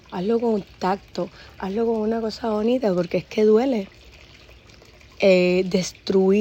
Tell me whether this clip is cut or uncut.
uncut